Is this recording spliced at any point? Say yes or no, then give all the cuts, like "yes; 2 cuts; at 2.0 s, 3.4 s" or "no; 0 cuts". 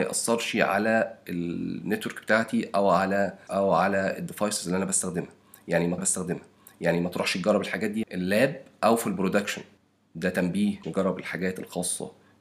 yes; 5 cuts; at 3.5 s, 6.0 s, 8.0 s, 9.8 s, 10.8 s